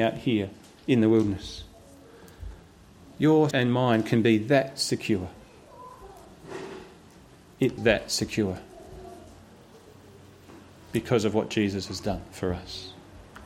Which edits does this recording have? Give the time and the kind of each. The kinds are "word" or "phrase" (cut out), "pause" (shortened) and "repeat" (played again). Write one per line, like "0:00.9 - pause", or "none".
0:03.5 - word
0:07.8 - word